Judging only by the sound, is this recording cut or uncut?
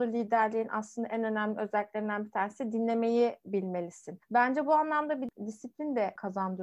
cut